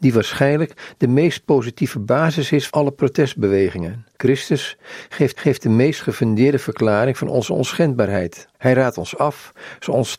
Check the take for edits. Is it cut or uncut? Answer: cut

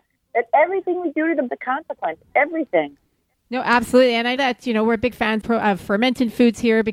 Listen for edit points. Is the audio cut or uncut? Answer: cut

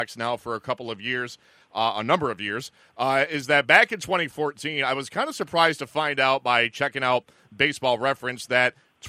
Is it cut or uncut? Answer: uncut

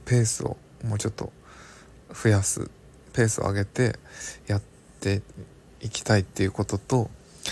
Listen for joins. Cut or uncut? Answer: uncut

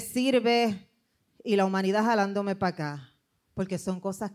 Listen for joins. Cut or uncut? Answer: cut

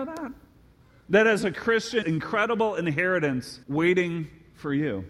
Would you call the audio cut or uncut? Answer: cut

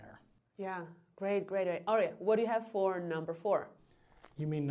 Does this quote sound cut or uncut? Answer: uncut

